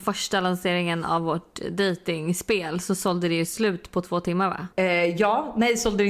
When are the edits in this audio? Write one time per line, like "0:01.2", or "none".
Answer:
0:04.7